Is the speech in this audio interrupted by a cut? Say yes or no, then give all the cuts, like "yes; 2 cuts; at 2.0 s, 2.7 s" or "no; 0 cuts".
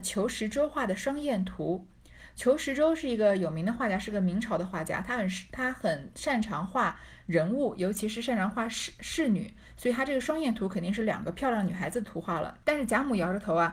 yes; 1 cut; at 12.6 s